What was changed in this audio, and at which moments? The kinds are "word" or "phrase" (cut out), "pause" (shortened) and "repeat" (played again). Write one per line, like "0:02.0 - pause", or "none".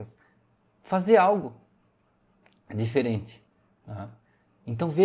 none